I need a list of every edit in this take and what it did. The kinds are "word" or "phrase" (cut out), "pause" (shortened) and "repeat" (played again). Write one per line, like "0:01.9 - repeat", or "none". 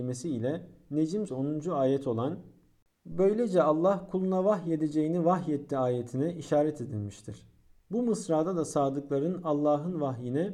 0:01.3 - word